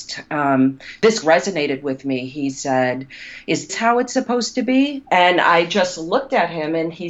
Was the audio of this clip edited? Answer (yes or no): yes